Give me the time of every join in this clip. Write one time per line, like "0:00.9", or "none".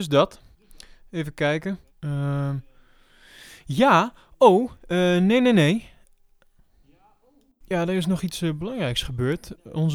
0:01.9